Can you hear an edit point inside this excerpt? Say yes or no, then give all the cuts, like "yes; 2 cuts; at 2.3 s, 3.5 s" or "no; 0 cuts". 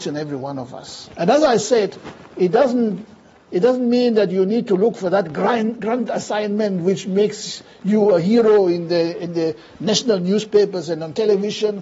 no; 0 cuts